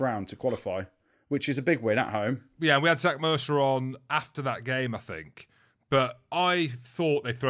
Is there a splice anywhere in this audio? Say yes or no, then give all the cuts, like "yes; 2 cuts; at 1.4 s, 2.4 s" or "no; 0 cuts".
no; 0 cuts